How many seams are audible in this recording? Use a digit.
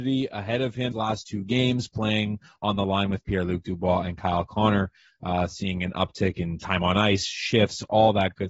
1